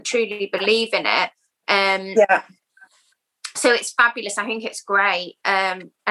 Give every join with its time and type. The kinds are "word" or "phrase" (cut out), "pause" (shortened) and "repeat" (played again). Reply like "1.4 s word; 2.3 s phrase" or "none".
none